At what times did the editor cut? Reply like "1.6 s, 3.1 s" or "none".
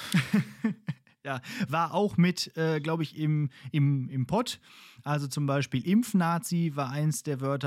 none